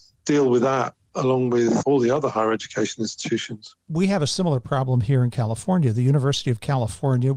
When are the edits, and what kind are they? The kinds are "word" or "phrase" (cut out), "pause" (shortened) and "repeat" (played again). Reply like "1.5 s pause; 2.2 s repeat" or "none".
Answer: 1.8 s word